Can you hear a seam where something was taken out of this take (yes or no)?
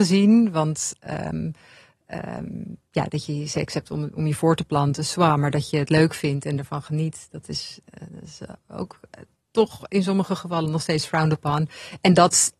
no